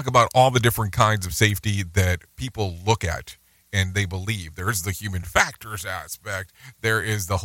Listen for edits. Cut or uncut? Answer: uncut